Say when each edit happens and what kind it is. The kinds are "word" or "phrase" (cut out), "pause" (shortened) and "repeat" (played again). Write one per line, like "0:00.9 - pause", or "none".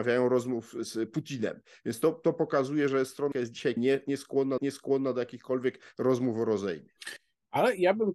0:03.3 - word
0:03.8 - word
0:04.6 - repeat